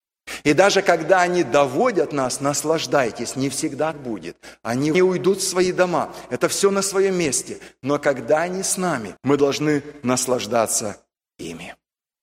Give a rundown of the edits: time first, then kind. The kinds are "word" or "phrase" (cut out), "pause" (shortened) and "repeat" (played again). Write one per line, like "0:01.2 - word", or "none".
0:03.9 - word
0:04.9 - phrase
0:09.2 - pause